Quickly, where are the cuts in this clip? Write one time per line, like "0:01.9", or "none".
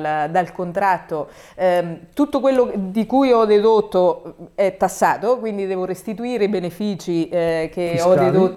none

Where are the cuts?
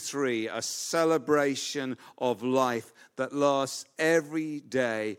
none

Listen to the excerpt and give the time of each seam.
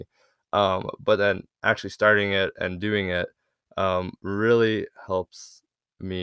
none

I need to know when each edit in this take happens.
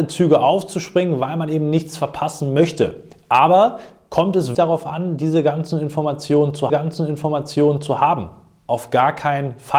0:04.5
0:06.7

